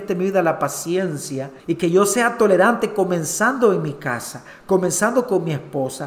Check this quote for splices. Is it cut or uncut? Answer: cut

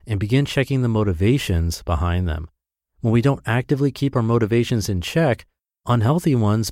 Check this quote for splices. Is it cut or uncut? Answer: uncut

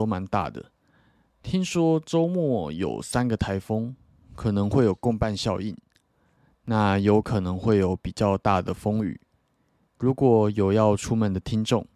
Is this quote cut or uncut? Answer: uncut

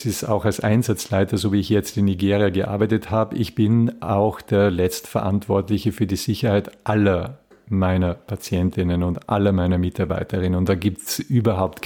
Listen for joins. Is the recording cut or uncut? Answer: uncut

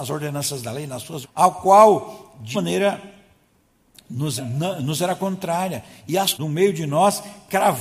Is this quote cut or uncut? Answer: cut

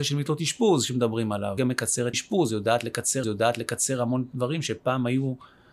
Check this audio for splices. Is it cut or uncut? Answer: cut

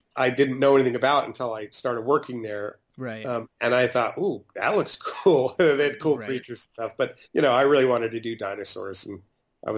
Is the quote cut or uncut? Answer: cut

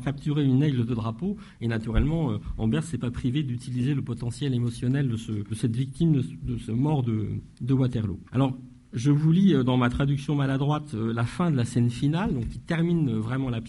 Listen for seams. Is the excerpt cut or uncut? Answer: cut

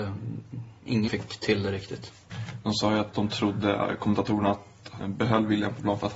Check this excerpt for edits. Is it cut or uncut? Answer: cut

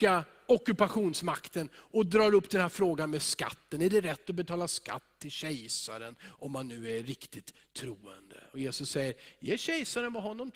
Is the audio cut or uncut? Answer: uncut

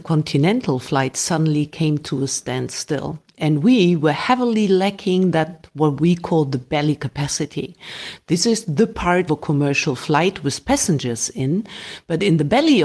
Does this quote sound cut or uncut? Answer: cut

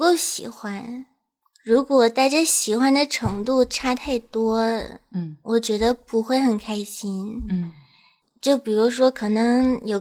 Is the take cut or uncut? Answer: uncut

